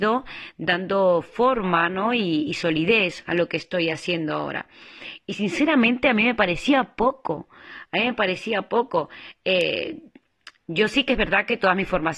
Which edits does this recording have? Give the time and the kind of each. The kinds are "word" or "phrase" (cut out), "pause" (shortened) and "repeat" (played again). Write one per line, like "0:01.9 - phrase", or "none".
none

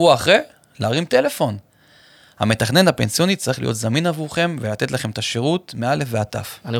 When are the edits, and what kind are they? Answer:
none

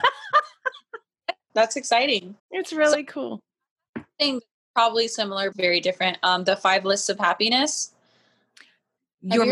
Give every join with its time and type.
0:01.5 - word
0:02.4 - pause
0:05.5 - phrase

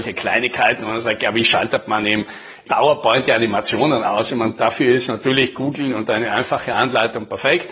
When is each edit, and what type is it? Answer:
none

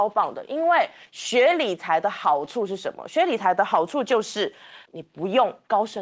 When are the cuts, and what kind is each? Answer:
0:04.9 - pause

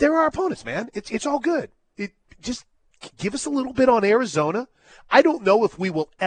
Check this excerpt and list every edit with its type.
none

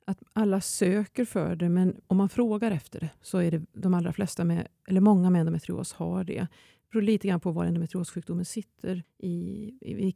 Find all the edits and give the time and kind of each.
none

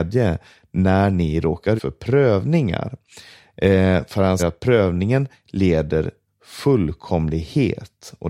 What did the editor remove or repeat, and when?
0:01.8 - word
0:04.4 - word
0:06.3 - word

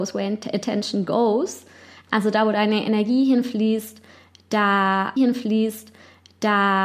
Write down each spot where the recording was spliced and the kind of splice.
0:05.2 - repeat

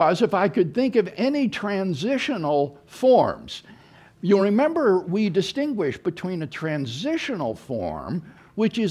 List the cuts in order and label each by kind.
none

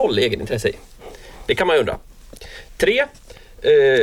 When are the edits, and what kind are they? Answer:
none

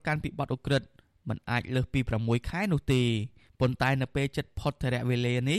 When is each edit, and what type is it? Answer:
none

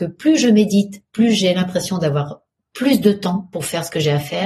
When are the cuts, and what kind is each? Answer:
none

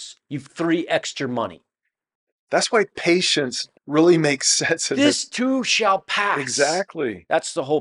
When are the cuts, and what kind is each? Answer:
0:02.1 - pause
0:03.8 - pause

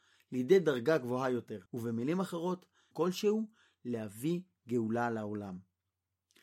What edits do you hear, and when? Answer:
0:01.7 - pause
0:02.9 - phrase

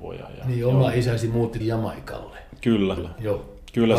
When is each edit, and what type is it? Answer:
0:01.6 - word
0:03.0 - word

